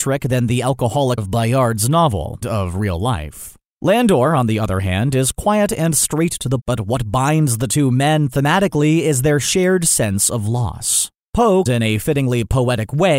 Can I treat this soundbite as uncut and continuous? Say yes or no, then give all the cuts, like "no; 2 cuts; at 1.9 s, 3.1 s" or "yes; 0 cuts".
no; 4 cuts; at 1.2 s, 2.4 s, 6.6 s, 11.7 s